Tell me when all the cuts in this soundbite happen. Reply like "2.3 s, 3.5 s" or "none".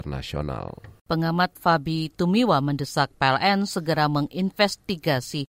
1.6 s